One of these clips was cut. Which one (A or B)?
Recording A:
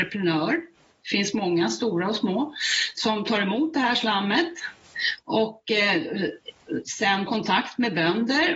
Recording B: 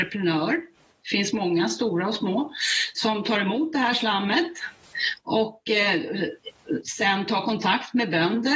A